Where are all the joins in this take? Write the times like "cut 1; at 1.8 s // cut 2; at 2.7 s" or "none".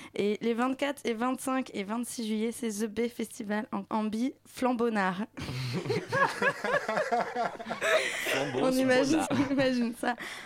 cut 1; at 3.8 s // cut 2; at 9.2 s